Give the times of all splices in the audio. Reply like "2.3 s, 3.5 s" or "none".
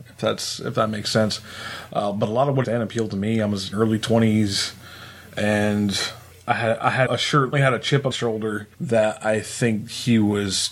2.6 s, 3.7 s, 6.3 s, 7.1 s, 7.5 s, 8.1 s, 8.7 s

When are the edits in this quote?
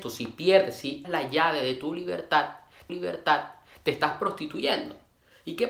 1.0 s, 2.9 s

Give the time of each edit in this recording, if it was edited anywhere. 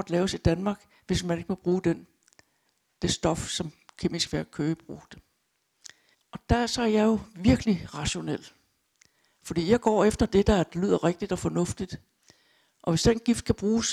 6.1 s

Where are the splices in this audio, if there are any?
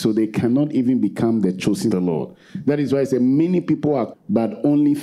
1.9 s, 4.1 s

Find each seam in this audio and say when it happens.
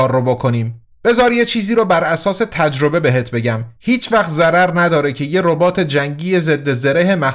3.8 s

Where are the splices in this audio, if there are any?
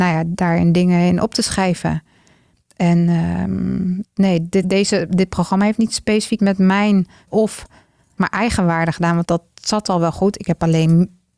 4.0 s, 4.6 s, 6.4 s, 7.3 s, 8.2 s, 9.2 s

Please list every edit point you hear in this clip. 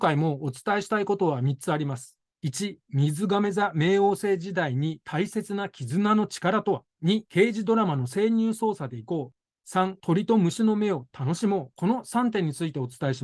6.9 s, 11.1 s

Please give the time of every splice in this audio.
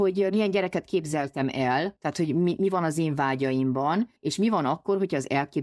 4.2 s

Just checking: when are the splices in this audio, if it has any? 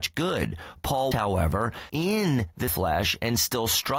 1.1 s, 1.9 s, 2.7 s

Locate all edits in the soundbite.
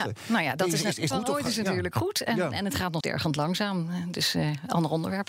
1.1 s, 3.0 s

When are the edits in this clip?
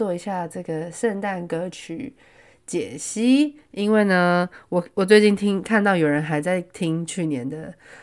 none

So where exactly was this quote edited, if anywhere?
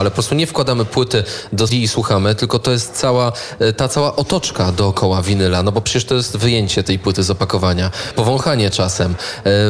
1.7 s, 8.1 s

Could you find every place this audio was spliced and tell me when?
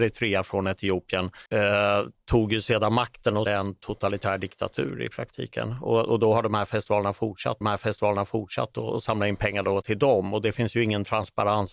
1.5 s, 3.5 s, 7.6 s, 9.8 s

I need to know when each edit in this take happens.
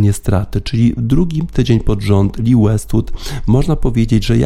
none

